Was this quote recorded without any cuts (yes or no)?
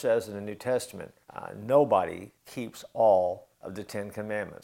no